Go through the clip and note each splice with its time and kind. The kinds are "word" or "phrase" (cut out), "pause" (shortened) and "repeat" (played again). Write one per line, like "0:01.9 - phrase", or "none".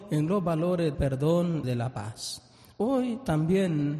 0:00.9 - word
0:01.6 - word